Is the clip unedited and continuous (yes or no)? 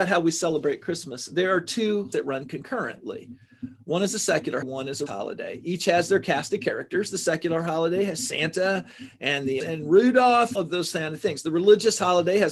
no